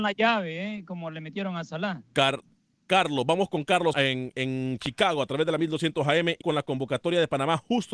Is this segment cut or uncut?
cut